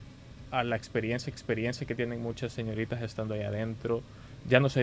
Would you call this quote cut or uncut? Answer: cut